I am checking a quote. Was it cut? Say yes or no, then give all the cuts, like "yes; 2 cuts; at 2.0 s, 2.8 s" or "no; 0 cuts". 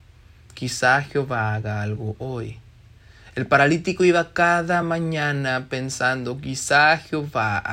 no; 0 cuts